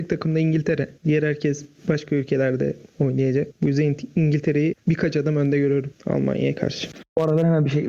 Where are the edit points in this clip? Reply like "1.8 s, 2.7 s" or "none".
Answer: none